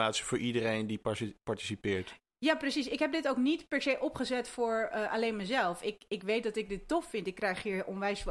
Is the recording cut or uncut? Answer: uncut